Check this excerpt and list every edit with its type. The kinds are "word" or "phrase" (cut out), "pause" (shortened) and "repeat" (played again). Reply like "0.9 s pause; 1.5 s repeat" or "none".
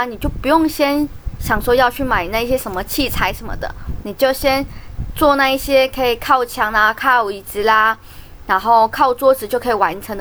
4.0 s phrase